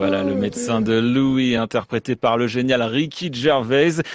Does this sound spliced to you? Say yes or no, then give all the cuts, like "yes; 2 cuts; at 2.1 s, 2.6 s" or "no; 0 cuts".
no; 0 cuts